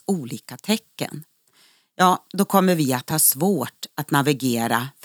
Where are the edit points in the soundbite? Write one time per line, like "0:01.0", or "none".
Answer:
none